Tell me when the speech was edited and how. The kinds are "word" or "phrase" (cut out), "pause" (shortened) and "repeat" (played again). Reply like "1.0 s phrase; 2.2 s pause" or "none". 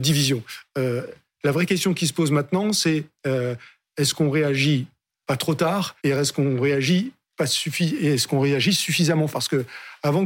6.0 s pause; 9.3 s word